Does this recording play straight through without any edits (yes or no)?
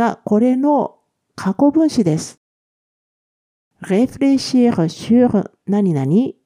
yes